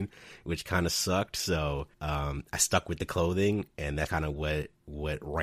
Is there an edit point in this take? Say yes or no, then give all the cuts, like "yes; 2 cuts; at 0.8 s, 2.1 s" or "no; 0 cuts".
yes; 2 cuts; at 1.9 s, 4.1 s